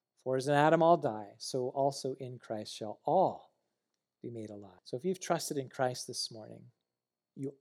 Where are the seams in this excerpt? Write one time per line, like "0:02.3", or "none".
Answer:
0:04.8